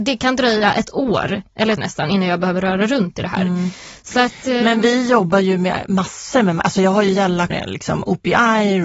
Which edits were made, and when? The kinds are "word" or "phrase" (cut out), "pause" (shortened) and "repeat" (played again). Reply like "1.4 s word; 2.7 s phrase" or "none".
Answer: 1.8 s word; 7.5 s word